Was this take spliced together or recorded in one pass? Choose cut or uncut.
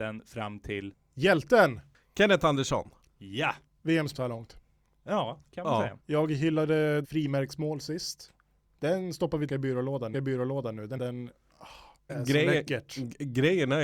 cut